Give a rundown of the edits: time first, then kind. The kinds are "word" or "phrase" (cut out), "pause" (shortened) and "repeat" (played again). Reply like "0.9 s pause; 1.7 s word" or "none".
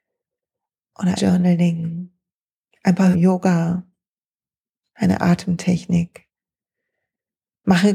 1.2 s word; 3.1 s phrase